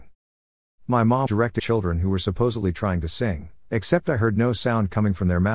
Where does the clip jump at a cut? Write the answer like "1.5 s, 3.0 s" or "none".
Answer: 1.3 s, 1.6 s